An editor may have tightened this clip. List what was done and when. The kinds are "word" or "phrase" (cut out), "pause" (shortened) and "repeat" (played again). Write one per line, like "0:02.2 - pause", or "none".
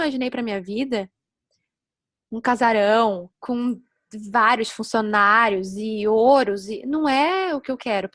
0:03.3 - pause